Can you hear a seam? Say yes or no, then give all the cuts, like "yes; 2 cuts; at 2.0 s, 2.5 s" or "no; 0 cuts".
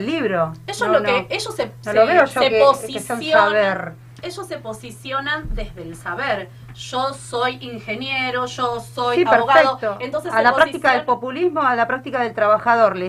no; 0 cuts